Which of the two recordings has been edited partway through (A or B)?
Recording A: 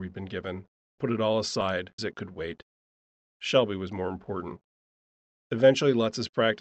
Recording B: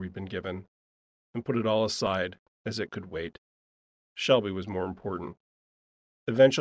A